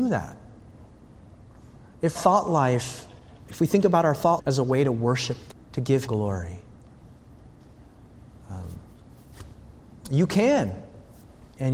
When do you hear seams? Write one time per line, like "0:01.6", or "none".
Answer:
0:02.1
0:04.4
0:05.5
0:06.1